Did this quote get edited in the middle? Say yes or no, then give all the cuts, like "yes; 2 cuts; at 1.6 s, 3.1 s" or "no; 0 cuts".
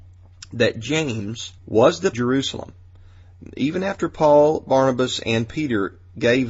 yes; 2 cuts; at 1.6 s, 2.1 s